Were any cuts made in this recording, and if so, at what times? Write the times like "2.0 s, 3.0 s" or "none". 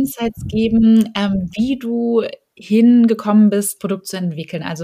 3.8 s

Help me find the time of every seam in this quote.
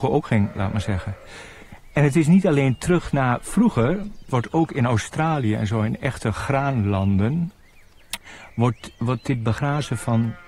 none

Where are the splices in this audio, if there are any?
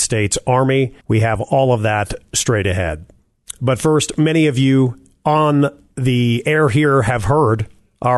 1.0 s

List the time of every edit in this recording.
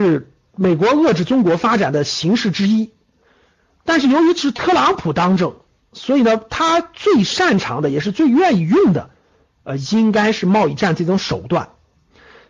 none

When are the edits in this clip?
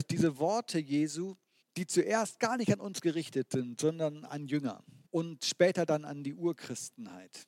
1.6 s, 5.1 s

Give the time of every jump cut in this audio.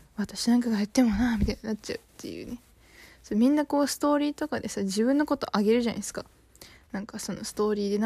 none

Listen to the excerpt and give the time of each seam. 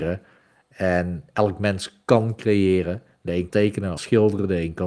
3.5 s, 4.0 s

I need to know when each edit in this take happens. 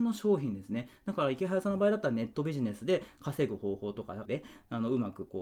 4.3 s

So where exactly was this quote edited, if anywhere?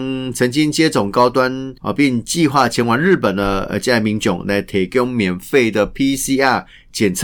1.8 s

